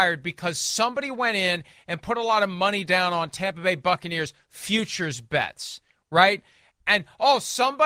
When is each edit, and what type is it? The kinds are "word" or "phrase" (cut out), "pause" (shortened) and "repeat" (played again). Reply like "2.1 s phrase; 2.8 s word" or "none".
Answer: none